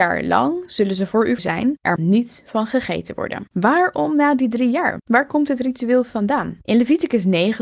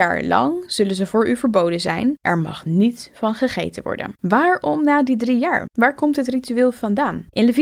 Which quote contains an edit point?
first; 2 cuts; at 1.4 s, 2.0 s

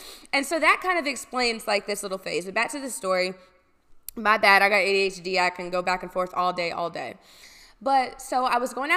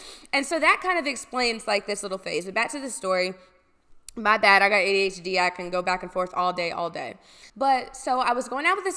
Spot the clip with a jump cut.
second; 1 cut; at 7.5 s

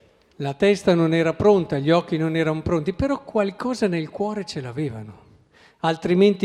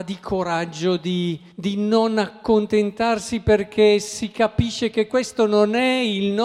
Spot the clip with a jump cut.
second; 1 cut; at 1.5 s

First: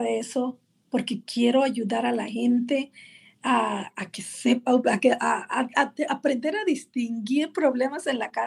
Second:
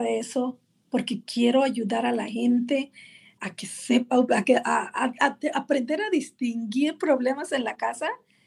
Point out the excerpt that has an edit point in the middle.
second; 1 cut; at 3.4 s

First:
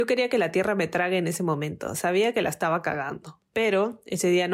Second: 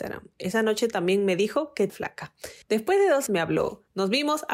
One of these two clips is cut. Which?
second; 3 cuts; at 1.9 s, 2.6 s, 3.3 s

